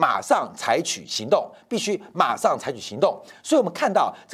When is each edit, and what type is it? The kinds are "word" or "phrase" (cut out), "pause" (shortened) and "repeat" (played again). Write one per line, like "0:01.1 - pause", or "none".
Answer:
none

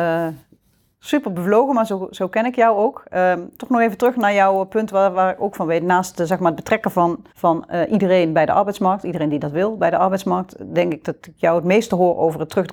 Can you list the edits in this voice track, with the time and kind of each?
0:07.3 - pause

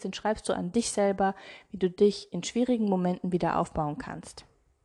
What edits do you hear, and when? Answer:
none

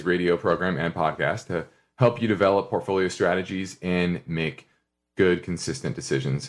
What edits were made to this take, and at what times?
none

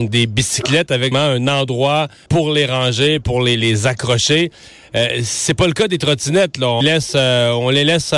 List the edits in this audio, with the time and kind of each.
0:01.1 - word
0:02.3 - word
0:06.8 - word

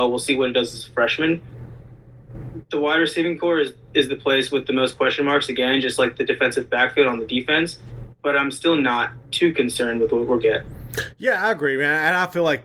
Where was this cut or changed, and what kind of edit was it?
0:10.4 - word

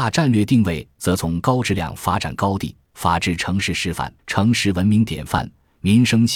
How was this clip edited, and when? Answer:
0:04.2 - pause

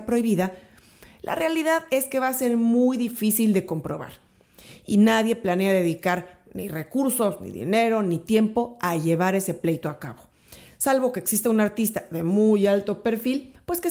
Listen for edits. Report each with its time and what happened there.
none

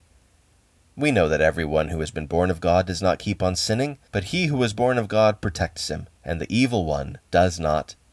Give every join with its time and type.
0:04.1 - pause
0:06.2 - pause
0:07.2 - pause

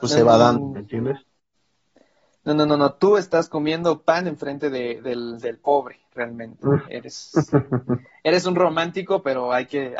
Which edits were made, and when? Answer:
none

